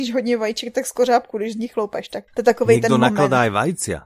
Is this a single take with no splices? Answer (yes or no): no